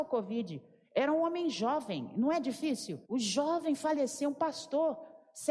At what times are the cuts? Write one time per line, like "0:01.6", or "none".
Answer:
0:03.0